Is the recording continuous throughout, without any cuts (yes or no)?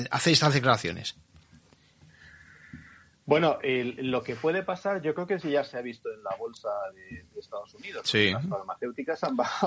yes